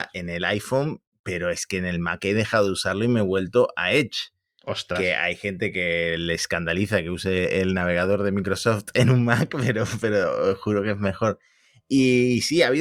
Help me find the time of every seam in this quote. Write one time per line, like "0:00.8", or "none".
none